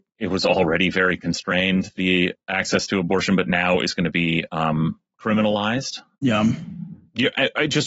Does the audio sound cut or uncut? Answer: uncut